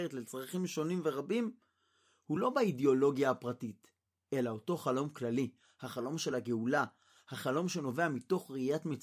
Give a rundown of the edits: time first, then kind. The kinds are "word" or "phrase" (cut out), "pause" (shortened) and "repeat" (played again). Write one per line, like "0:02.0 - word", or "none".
none